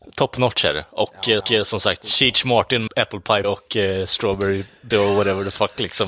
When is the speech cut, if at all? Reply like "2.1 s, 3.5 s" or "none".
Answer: 1.4 s, 2.9 s, 3.4 s, 4.9 s